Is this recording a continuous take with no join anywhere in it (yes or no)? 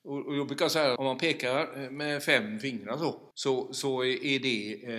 no